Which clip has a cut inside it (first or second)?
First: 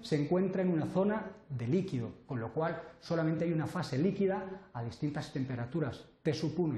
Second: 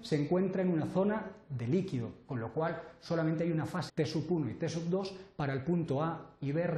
second